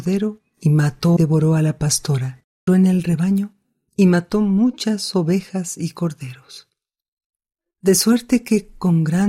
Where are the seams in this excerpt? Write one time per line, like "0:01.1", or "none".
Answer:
0:01.2
0:02.7